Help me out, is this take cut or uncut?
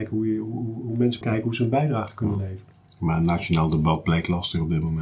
cut